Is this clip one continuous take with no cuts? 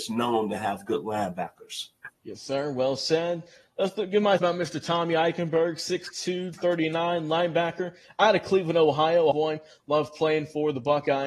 no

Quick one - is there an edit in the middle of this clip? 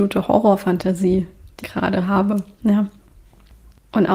yes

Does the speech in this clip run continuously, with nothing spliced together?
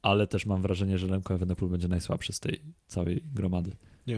no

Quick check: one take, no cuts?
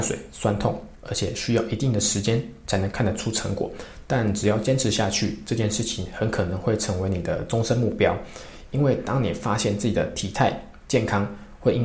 no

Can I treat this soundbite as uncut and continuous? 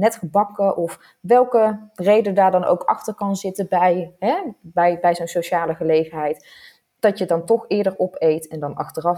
yes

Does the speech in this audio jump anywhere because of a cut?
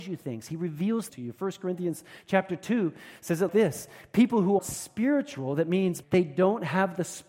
yes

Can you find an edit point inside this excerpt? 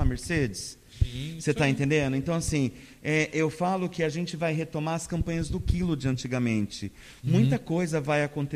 no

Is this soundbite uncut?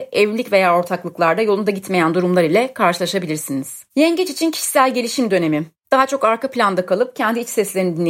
no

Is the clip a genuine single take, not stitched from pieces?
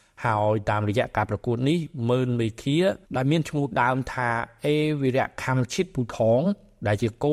no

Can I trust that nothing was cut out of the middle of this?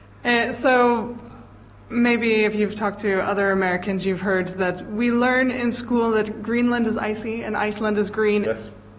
yes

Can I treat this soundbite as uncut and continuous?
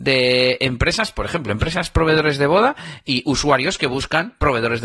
yes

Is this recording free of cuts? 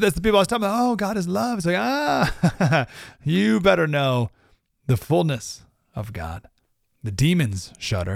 yes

